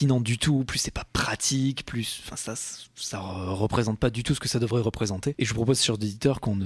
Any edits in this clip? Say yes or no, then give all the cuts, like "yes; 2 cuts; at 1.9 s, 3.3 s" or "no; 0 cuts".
no; 0 cuts